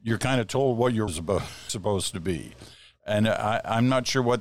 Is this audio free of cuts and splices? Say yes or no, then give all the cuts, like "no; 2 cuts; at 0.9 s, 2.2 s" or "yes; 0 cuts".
no; 2 cuts; at 1.1 s, 1.7 s